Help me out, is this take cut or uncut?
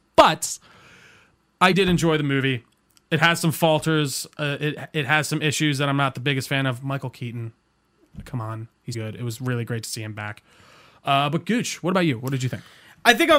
cut